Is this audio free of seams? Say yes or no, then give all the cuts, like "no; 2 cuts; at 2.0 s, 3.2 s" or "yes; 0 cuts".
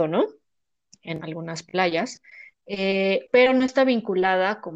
no; 2 cuts; at 1.2 s, 2.5 s